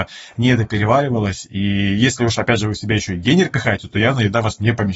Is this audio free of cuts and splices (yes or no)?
yes